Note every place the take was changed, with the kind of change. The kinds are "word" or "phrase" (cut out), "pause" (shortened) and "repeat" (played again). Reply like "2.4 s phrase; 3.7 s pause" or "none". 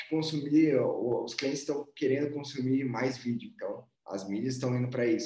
3.9 s pause